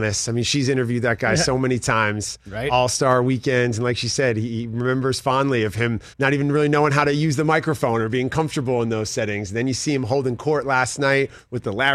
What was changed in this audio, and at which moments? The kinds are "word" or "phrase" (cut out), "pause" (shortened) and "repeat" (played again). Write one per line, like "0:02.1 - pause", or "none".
0:06.1 - pause